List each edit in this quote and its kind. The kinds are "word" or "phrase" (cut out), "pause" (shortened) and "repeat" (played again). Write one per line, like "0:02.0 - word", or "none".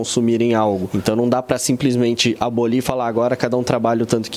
none

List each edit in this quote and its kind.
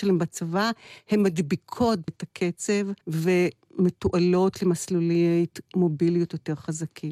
0:02.1 - phrase
0:03.0 - pause

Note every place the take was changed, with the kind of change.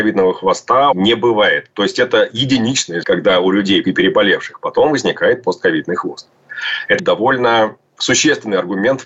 0:00.9 - phrase
0:03.0 - word
0:03.8 - word
0:07.0 - phrase

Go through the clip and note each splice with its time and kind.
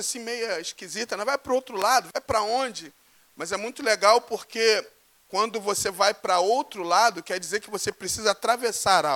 none

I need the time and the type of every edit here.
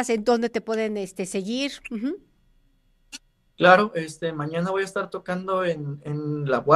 none

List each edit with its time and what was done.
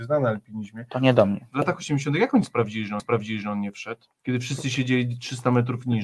0:03.0 - repeat
0:04.1 - pause

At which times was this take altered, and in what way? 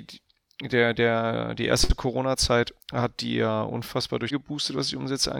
0:02.8 - pause
0:04.3 - phrase

